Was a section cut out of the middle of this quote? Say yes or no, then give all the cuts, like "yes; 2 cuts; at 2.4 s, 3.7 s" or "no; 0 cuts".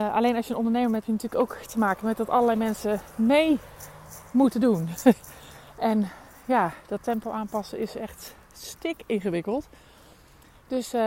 yes; 1 cut; at 1.0 s